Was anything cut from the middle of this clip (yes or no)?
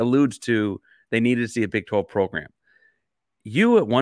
no